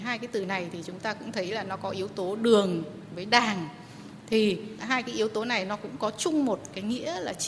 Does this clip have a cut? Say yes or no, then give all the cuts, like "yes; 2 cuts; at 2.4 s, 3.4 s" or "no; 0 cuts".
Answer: no; 0 cuts